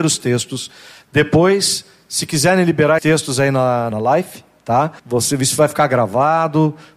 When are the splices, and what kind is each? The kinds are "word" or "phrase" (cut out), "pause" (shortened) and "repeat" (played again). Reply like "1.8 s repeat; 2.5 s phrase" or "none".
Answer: 3.0 s word; 3.9 s phrase; 5.0 s pause